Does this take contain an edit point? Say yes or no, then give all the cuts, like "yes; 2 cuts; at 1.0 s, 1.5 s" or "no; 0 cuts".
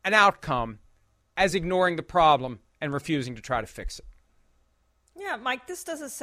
no; 0 cuts